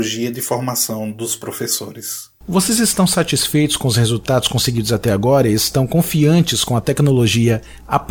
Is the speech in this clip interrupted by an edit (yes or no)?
no